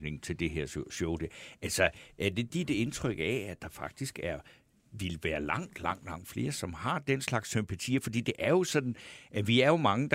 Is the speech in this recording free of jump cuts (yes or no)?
yes